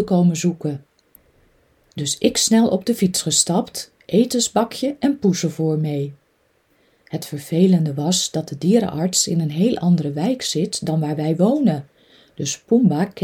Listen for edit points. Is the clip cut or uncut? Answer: uncut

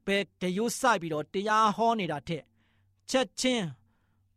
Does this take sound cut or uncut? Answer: uncut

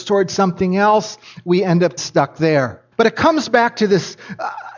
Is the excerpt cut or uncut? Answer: cut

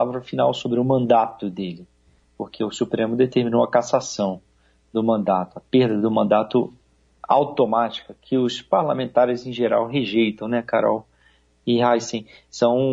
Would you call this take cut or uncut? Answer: uncut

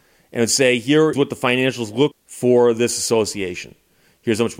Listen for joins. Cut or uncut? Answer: cut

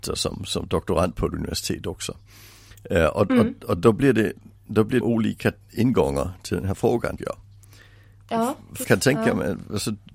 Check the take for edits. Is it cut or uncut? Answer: cut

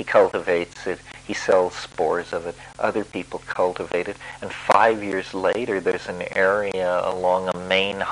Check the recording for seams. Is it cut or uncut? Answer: uncut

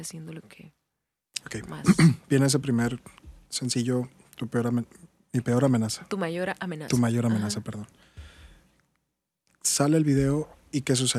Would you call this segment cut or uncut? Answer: uncut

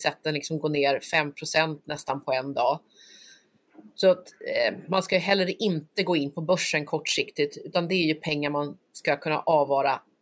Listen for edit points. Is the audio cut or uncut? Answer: uncut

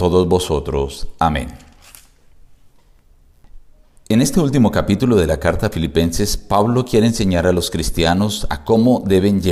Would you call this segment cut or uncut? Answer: uncut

